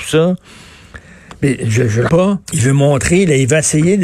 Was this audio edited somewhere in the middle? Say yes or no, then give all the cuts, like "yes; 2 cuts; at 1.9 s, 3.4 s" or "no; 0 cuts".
yes; 2 cuts; at 2.1 s, 2.4 s